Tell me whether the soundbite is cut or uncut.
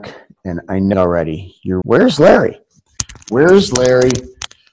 cut